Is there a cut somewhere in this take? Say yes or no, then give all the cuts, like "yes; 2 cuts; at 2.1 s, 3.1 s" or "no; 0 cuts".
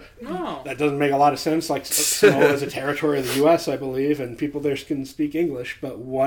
no; 0 cuts